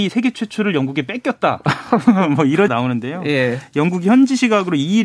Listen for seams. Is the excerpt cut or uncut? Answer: cut